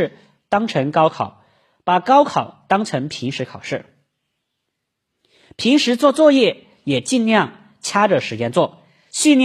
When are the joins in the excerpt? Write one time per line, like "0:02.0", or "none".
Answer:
none